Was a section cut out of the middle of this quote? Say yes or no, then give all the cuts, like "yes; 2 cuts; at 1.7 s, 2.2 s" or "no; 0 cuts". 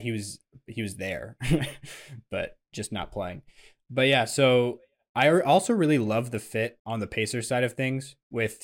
no; 0 cuts